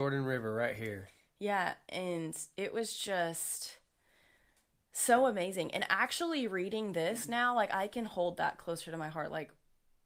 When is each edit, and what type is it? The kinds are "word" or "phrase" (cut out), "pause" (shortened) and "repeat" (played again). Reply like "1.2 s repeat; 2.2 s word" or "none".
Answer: none